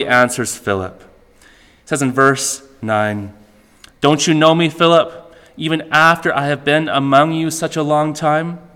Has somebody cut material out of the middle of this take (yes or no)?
no